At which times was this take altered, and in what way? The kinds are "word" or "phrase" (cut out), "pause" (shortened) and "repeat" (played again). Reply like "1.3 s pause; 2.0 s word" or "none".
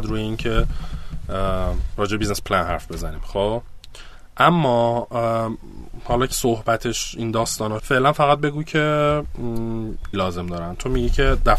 6.3 s word; 7.8 s word; 10.1 s word